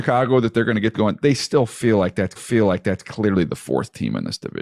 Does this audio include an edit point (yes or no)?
yes